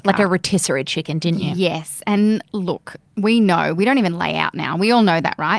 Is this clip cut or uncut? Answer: uncut